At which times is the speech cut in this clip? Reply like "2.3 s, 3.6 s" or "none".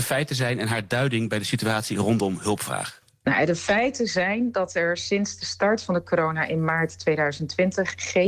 none